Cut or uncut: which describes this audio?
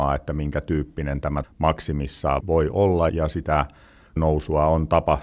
cut